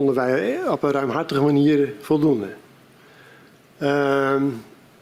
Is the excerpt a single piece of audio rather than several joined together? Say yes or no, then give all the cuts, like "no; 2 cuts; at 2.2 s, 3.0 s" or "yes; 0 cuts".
yes; 0 cuts